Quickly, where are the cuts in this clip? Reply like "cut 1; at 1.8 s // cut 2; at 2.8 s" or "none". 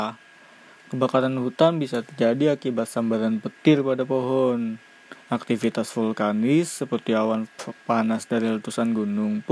cut 1; at 5.2 s